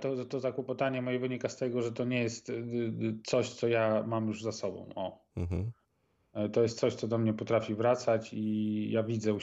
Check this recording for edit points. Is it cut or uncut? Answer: uncut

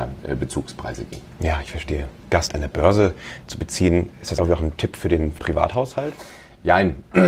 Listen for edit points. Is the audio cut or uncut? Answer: cut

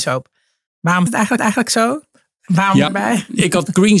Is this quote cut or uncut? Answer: cut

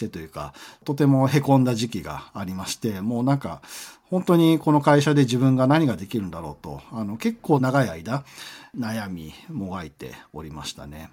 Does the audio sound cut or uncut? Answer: uncut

